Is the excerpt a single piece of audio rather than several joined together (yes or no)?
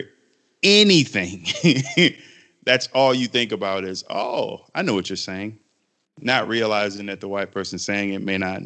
yes